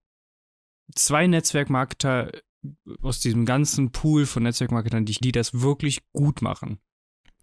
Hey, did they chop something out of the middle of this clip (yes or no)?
yes